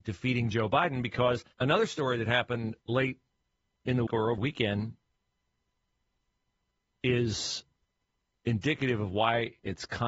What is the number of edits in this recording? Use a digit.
4